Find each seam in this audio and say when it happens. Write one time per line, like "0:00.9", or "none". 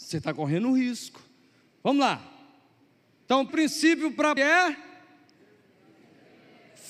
0:03.5
0:04.4